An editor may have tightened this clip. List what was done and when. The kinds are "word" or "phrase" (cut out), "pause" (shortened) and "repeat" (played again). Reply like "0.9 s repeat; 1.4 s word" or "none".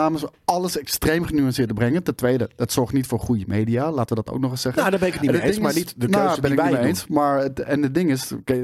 none